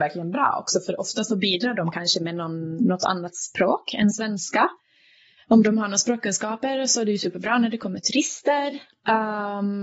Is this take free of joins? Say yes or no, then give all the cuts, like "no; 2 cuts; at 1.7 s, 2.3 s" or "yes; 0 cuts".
yes; 0 cuts